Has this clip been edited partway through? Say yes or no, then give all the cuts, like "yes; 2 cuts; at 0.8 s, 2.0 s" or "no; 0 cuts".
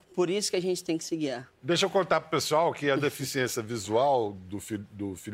no; 0 cuts